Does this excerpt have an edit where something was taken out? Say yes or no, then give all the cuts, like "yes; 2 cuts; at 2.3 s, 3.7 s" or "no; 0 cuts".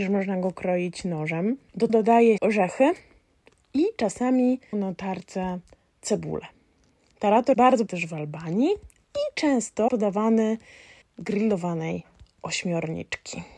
yes; 7 cuts; at 1.9 s, 2.4 s, 4.7 s, 7.5 s, 7.9 s, 9.9 s, 11.0 s